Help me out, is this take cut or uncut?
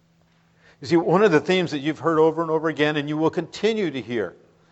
uncut